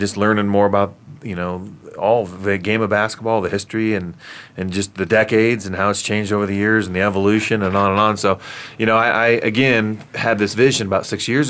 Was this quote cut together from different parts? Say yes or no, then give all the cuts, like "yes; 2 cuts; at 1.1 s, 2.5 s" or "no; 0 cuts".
no; 0 cuts